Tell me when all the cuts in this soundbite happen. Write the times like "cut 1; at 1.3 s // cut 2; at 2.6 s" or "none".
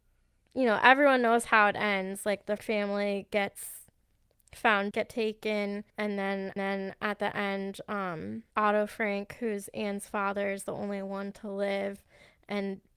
cut 1; at 2.6 s // cut 2; at 4.9 s // cut 3; at 5.9 s // cut 4; at 6.6 s // cut 5; at 8.5 s